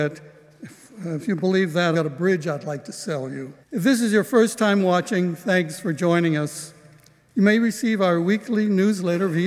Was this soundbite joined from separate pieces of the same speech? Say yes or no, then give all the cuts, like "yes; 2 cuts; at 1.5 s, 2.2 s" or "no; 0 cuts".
yes; 2 cuts; at 1.9 s, 3.6 s